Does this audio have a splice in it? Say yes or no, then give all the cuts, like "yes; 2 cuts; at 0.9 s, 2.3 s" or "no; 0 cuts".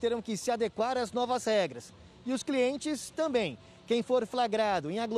no; 0 cuts